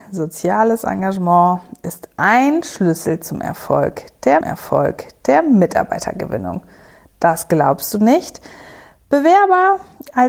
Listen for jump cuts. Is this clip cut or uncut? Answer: cut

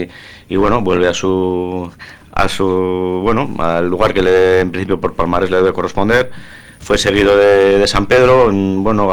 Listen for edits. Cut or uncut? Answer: uncut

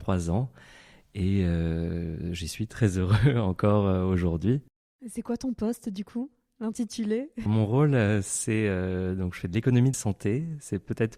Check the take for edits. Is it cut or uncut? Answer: cut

